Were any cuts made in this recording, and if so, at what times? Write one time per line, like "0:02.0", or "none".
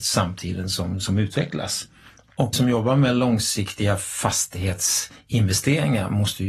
0:02.5